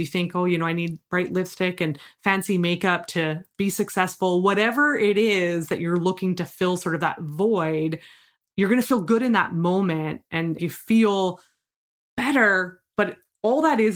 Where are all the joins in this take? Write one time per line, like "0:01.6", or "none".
0:10.6